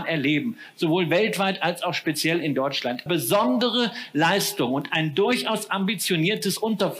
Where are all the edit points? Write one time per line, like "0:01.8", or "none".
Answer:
0:03.1